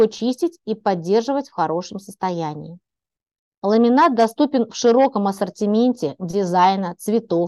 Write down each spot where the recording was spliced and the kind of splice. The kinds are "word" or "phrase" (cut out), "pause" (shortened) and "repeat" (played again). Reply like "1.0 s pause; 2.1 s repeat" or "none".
none